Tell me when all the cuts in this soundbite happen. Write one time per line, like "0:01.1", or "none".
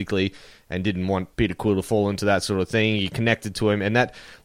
0:01.3